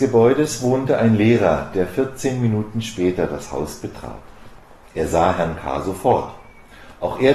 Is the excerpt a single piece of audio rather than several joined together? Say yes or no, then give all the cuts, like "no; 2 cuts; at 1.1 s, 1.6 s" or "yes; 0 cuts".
yes; 0 cuts